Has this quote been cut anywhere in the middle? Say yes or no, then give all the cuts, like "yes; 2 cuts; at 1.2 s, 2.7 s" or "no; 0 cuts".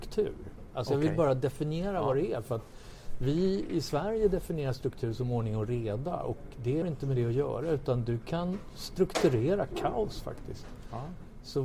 yes; 1 cut; at 6.8 s